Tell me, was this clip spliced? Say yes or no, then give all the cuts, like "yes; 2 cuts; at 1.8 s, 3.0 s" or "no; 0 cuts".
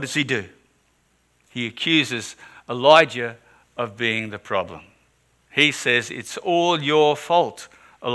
no; 0 cuts